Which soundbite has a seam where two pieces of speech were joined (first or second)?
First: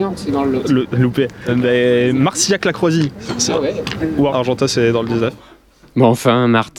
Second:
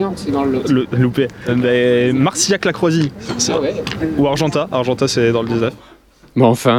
first